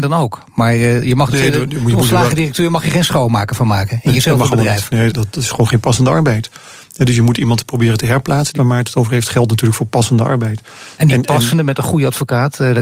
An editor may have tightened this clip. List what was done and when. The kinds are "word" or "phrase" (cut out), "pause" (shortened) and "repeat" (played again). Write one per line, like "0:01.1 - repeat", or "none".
0:01.3 - word
0:05.1 - word
0:08.6 - word